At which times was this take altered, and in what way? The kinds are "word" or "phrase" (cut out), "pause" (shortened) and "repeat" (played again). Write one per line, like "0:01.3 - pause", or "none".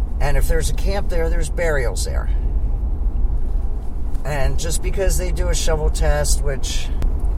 none

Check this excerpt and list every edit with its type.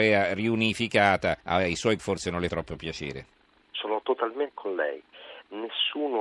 0:01.4 - pause
0:02.0 - word
0:02.5 - word
0:04.5 - word

